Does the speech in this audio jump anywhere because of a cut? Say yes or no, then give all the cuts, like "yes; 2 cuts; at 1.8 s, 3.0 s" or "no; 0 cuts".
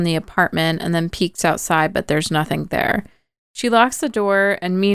no; 0 cuts